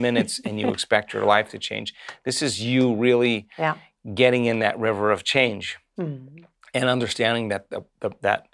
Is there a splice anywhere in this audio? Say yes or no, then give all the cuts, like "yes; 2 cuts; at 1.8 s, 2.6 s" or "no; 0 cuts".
no; 0 cuts